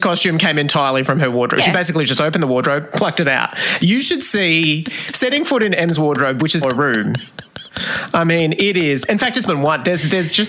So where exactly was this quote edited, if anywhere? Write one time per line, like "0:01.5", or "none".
0:06.6
0:09.5